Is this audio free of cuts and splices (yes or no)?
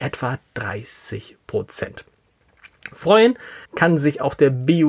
no